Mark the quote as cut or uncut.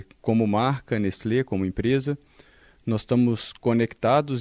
uncut